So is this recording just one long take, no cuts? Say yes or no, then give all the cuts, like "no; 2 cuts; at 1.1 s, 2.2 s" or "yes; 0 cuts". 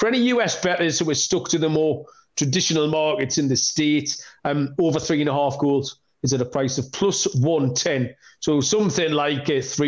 yes; 0 cuts